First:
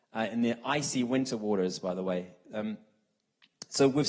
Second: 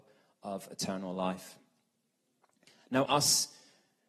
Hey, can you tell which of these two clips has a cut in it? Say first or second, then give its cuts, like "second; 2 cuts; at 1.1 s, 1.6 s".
second; 1 cut; at 3.1 s